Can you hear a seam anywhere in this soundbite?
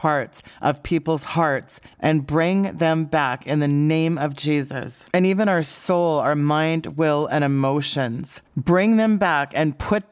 yes; 1 cut; at 5.1 s

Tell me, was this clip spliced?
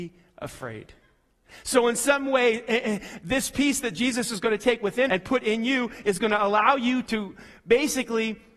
yes; 2 cuts; at 5.1 s, 7.0 s

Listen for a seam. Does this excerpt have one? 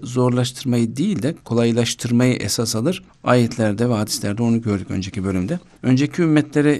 no; 0 cuts

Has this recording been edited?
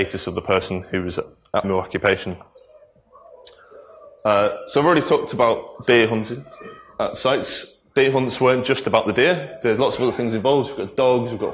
yes; 1 cut; at 1.6 s

